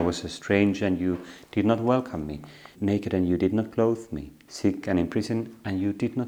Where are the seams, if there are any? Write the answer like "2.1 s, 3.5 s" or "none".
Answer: 2.7 s